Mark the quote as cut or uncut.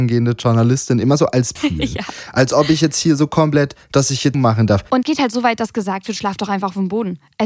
cut